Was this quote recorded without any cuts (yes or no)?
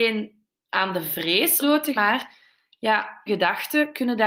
no